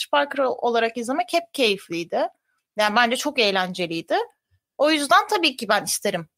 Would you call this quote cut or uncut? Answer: uncut